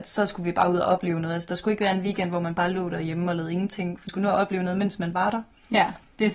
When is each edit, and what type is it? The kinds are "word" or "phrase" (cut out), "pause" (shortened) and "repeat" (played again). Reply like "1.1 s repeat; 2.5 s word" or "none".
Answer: 4.1 s word